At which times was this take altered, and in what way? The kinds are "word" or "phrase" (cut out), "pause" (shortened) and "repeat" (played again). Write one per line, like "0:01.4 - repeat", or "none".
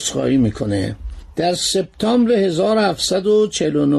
none